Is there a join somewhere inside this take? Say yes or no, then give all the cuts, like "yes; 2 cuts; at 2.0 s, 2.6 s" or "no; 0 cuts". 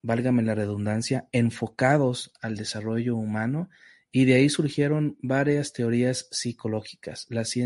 no; 0 cuts